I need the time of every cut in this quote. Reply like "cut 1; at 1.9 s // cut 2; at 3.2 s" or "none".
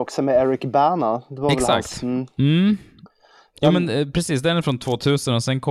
none